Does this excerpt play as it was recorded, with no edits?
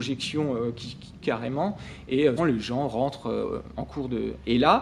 no; 3 cuts; at 1.2 s, 2.4 s, 3.7 s

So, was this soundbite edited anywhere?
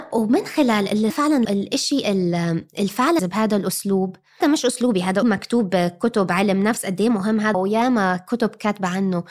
yes; 6 cuts; at 1.1 s, 1.4 s, 3.2 s, 4.4 s, 5.2 s, 7.5 s

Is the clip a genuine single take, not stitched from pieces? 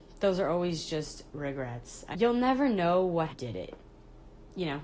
no; 2 cuts; at 2.1 s, 3.3 s

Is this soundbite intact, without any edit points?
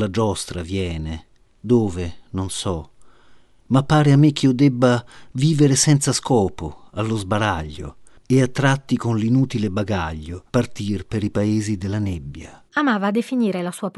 no; 3 cuts; at 1.4 s, 10.5 s, 12.7 s

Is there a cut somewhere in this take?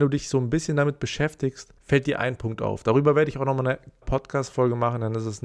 yes; 2 cuts; at 1.8 s, 4.0 s

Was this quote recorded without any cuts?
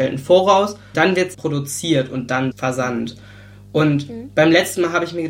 no; 3 cuts; at 0.9 s, 1.3 s, 2.5 s

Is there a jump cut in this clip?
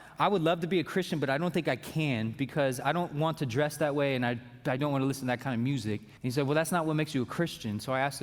yes; 2 cuts; at 4.8 s, 6.2 s

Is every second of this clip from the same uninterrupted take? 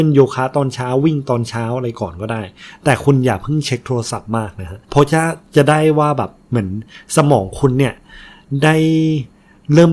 no; 1 cut; at 4.8 s

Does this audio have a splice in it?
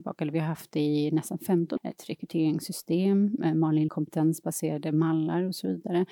yes; 2 cuts; at 1.8 s, 3.9 s

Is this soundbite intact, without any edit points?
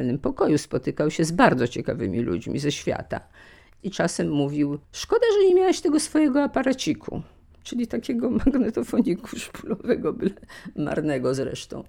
yes; 0 cuts

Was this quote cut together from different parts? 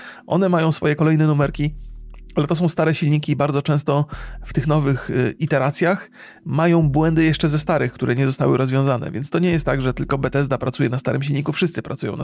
no; 0 cuts

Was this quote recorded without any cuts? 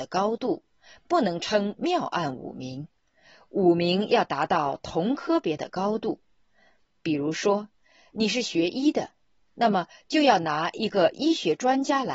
yes; 0 cuts

